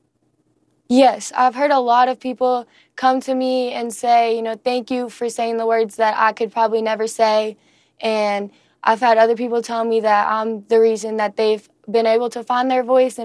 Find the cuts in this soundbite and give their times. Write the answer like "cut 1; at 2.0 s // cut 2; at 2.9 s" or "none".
none

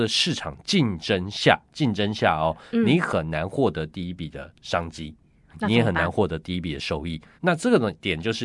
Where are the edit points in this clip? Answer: cut 1; at 7.3 s

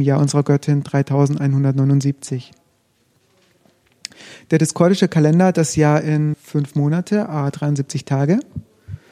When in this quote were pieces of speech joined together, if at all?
cut 1; at 5.5 s // cut 2; at 6.3 s

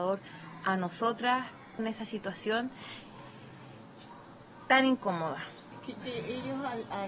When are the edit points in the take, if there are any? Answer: cut 1; at 1.8 s // cut 2; at 6.0 s

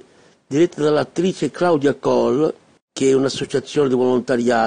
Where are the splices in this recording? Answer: cut 1; at 2.8 s

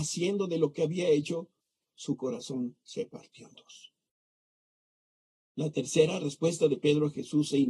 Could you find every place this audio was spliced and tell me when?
none

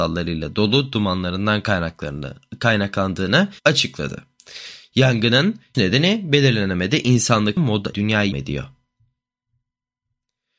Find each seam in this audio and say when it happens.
cut 1; at 3.6 s // cut 2; at 5.7 s // cut 3; at 7.6 s // cut 4; at 7.9 s // cut 5; at 8.3 s

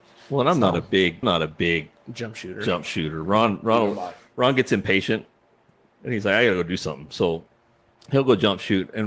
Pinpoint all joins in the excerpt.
cut 1; at 1.2 s

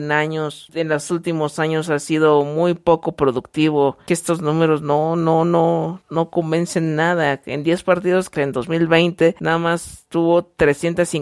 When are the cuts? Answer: cut 1; at 8.3 s

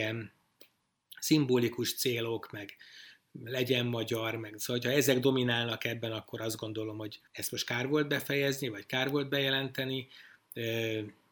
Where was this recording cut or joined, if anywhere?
cut 1; at 7.3 s

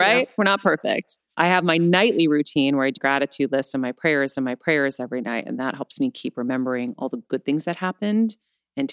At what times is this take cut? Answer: cut 1; at 1.3 s // cut 2; at 3.0 s // cut 3; at 4.3 s

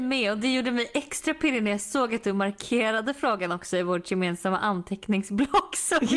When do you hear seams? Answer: none

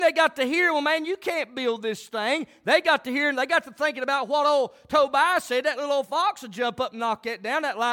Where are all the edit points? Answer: none

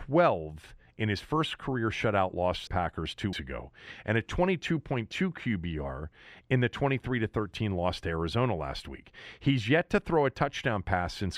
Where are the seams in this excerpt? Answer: cut 1; at 2.7 s // cut 2; at 3.3 s

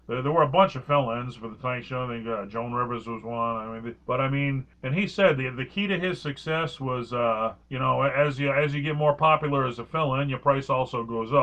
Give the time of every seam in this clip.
cut 1; at 4.0 s // cut 2; at 4.7 s // cut 3; at 7.6 s

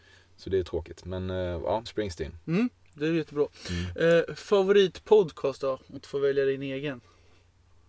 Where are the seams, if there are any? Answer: cut 1; at 1.9 s // cut 2; at 6.0 s

